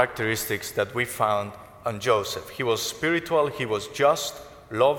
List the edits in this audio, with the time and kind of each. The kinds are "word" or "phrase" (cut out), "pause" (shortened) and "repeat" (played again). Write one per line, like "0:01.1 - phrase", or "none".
none